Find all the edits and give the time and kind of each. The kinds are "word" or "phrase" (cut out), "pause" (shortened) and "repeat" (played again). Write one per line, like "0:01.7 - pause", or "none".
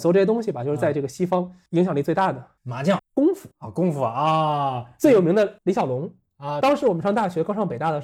0:02.6 - pause
0:03.0 - word
0:03.5 - pause
0:05.6 - pause
0:06.6 - phrase